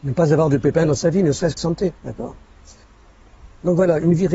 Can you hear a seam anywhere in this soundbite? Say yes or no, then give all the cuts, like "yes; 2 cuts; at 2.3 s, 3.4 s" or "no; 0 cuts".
yes; 2 cuts; at 1.6 s, 2.0 s